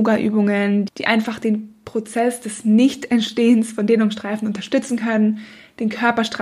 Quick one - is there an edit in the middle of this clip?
no; 0 cuts

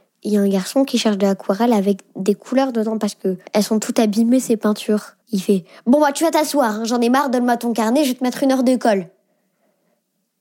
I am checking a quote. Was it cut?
yes; 2 cuts; at 3.5 s, 5.2 s

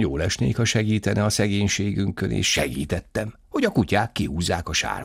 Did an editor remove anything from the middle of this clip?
no; 0 cuts

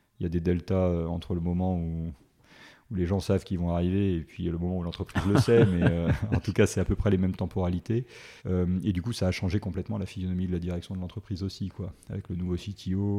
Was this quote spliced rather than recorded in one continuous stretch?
yes; 1 cut; at 8.4 s

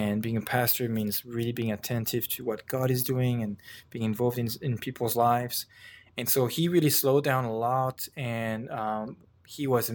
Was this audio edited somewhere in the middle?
no; 0 cuts

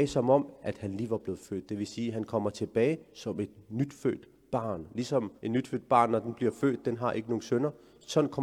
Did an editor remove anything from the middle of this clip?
yes; 2 cuts; at 3.0 s, 5.4 s

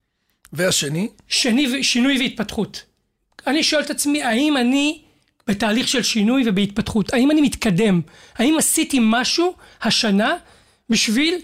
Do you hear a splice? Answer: no; 0 cuts

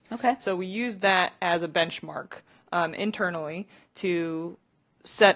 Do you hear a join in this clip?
no; 0 cuts

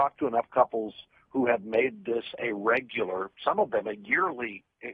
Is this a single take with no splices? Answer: yes; 0 cuts

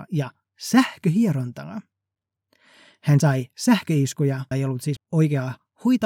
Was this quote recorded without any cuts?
no; 3 cuts; at 3.2 s, 4.5 s, 5.0 s

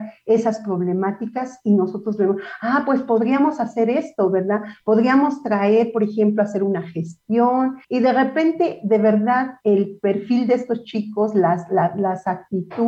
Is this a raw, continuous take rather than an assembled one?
no; 1 cut; at 7.8 s

